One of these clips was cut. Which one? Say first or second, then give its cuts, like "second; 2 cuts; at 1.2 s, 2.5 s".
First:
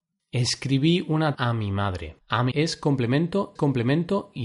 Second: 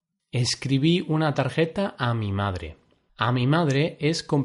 first; 4 cuts; at 1.3 s, 2.2 s, 2.5 s, 3.6 s